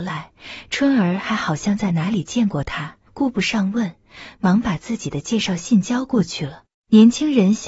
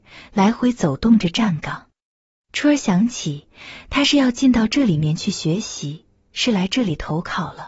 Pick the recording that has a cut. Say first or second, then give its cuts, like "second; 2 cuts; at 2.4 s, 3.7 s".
first; 2 cuts; at 3.1 s, 6.7 s